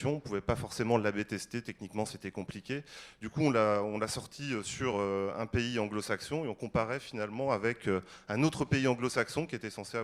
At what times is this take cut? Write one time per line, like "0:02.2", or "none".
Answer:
none